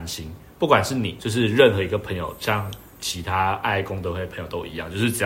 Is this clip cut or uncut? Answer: cut